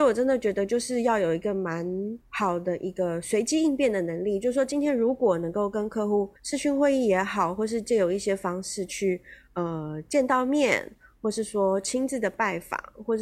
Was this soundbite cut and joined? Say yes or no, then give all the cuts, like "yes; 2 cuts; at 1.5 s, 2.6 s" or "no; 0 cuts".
yes; 2 cuts; at 2.2 s, 6.4 s